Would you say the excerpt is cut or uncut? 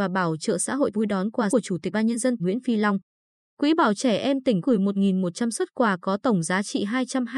cut